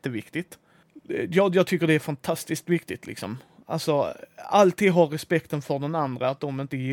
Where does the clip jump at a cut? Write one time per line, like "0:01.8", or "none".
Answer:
none